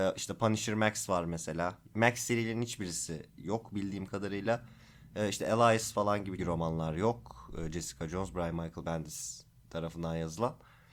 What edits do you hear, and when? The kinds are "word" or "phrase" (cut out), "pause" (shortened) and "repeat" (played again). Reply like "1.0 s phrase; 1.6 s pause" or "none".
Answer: 6.4 s word